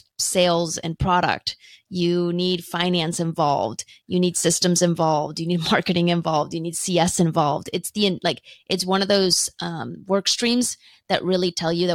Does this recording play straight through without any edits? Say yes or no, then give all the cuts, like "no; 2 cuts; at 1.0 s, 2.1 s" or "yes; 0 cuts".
yes; 0 cuts